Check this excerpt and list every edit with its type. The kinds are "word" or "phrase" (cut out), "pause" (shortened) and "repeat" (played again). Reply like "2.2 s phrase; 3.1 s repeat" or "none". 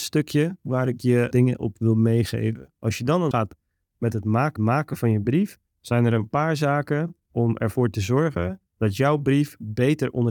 1.3 s word; 3.3 s phrase; 4.6 s repeat; 5.7 s pause; 7.3 s word; 8.7 s pause